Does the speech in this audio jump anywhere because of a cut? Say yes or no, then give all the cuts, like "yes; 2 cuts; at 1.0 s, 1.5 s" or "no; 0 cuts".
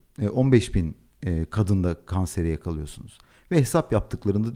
no; 0 cuts